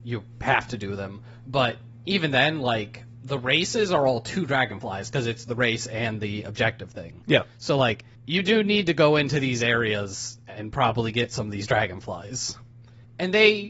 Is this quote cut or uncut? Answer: cut